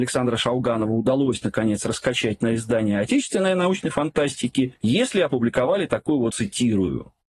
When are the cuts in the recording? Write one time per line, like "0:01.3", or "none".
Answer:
0:06.3